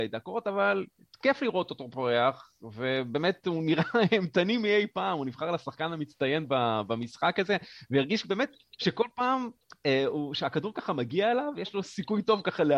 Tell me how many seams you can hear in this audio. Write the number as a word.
zero